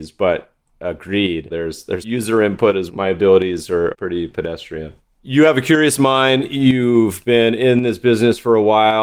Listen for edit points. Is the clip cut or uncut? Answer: cut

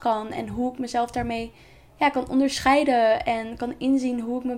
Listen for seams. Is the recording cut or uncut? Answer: uncut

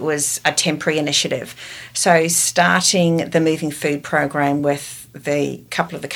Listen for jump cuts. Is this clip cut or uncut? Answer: uncut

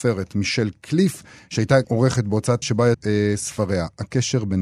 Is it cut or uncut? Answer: cut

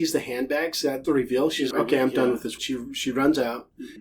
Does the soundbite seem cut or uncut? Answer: cut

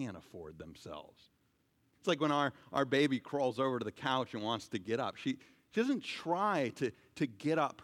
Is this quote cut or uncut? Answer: uncut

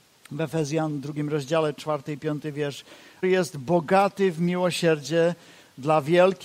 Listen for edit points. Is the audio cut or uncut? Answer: cut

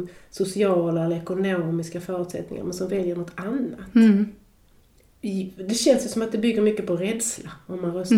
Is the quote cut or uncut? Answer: uncut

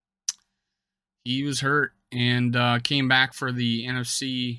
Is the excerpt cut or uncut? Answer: uncut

